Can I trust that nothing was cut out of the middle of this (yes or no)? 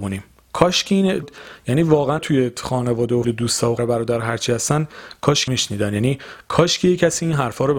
no